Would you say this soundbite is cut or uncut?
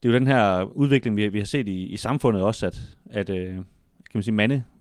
uncut